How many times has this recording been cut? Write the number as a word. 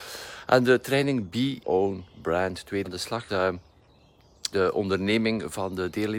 four